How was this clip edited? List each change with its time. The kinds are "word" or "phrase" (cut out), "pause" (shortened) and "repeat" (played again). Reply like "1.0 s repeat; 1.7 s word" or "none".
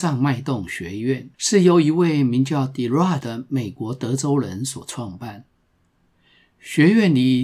1.3 s pause; 3.2 s word